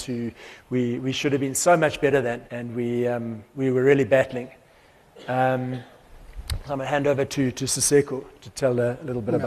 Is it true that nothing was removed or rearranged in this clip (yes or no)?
no